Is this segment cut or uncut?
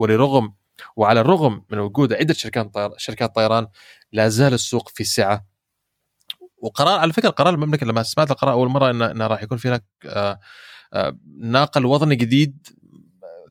uncut